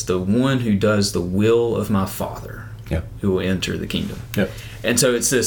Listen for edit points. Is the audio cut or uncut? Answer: uncut